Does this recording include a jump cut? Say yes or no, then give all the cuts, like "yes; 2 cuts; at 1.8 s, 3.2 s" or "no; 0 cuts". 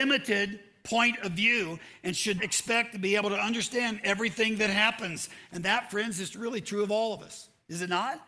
yes; 1 cut; at 2.4 s